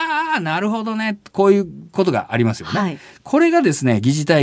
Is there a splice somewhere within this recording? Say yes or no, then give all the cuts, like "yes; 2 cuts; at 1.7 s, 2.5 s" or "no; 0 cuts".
no; 0 cuts